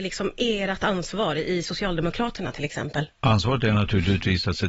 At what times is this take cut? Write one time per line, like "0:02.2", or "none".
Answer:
none